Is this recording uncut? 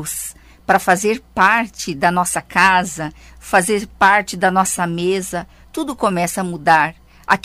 yes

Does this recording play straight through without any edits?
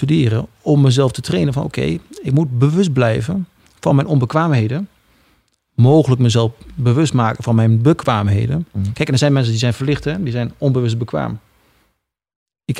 yes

